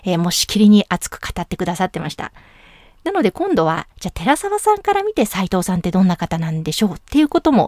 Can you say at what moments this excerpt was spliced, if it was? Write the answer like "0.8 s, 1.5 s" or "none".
3.9 s